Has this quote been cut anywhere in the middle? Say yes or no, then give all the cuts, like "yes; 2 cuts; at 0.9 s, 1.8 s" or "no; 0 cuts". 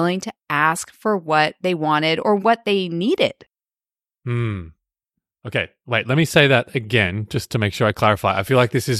no; 0 cuts